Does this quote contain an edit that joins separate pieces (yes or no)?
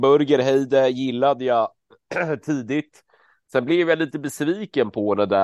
no